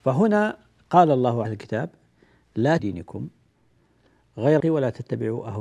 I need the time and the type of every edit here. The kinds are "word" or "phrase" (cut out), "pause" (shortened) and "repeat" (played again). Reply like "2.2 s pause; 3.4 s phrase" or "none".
1.4 s phrase; 2.8 s phrase; 4.6 s word